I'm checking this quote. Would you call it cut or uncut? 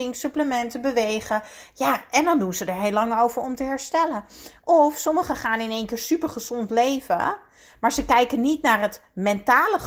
uncut